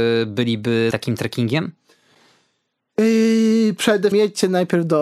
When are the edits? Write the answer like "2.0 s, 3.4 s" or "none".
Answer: 0.9 s, 4.1 s